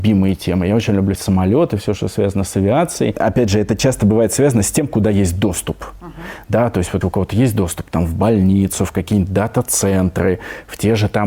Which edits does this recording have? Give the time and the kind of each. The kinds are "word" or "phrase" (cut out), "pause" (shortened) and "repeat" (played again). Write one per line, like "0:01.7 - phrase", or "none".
0:01.1 - word
0:07.0 - word